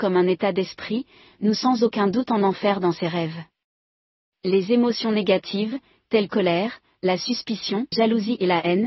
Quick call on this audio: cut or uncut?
cut